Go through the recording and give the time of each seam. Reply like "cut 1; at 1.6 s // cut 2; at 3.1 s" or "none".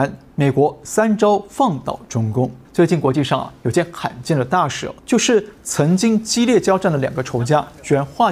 cut 1; at 2.7 s // cut 2; at 5.0 s